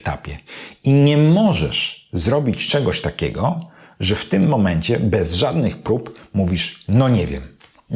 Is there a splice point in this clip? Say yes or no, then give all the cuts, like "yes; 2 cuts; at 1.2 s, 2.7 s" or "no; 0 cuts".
no; 0 cuts